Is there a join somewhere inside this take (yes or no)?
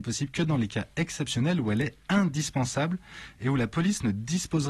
no